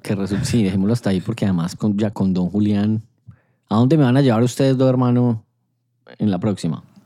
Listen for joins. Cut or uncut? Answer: cut